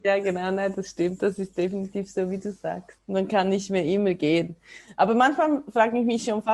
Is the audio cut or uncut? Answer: uncut